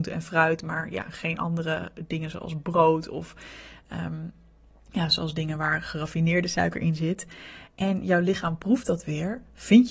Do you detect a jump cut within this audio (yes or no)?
no